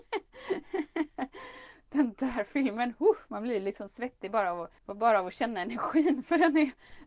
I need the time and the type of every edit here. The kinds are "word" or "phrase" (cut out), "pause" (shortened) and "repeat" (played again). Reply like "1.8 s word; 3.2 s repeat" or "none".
4.8 s pause